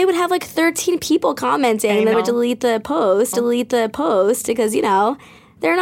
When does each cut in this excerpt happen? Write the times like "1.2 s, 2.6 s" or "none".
2.1 s, 3.3 s